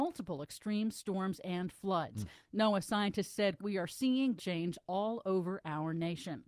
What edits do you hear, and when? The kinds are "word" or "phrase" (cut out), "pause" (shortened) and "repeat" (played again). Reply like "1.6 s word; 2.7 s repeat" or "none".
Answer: 3.6 s word; 4.4 s phrase